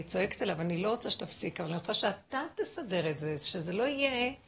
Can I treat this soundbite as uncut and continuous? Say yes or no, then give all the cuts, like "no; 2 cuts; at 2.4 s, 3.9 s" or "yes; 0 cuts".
yes; 0 cuts